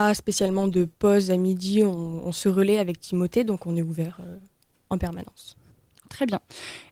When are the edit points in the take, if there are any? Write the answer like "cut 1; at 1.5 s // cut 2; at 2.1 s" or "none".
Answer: none